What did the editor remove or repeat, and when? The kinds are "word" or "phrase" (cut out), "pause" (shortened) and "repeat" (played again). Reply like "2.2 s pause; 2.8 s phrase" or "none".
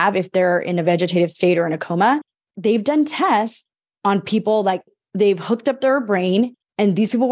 none